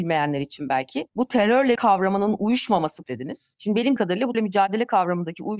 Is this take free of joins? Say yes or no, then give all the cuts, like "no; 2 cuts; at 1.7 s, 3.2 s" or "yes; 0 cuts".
no; 4 cuts; at 1.8 s, 3.0 s, 4.0 s, 4.3 s